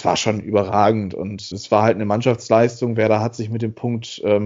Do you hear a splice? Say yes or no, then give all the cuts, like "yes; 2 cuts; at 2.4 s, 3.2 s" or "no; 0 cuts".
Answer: yes; 1 cut; at 1.5 s